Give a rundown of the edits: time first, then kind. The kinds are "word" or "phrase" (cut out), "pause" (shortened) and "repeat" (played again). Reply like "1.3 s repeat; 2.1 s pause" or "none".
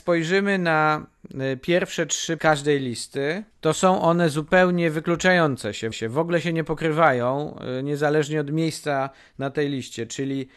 2.4 s phrase; 3.5 s pause; 5.9 s repeat